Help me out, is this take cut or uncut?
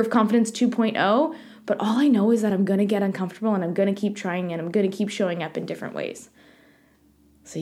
uncut